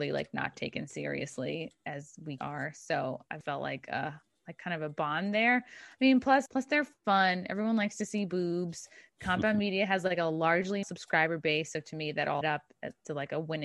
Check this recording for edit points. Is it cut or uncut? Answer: cut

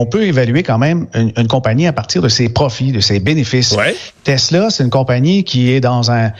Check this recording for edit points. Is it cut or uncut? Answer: uncut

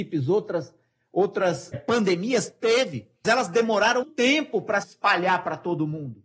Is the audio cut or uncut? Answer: cut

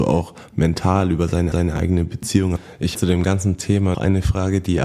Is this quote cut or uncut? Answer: cut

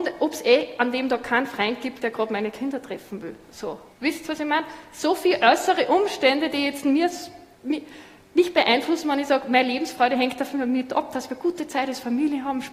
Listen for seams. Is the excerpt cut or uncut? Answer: cut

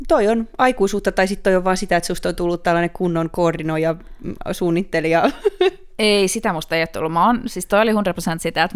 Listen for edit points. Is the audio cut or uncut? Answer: uncut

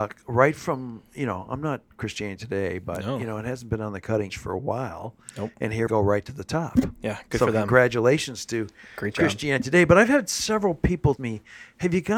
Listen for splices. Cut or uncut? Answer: cut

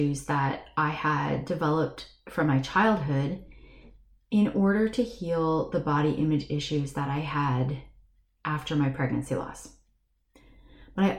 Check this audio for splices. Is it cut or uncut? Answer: uncut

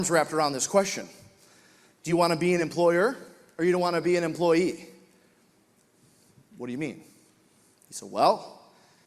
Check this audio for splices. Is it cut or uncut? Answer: uncut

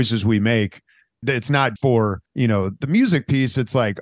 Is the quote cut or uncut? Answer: cut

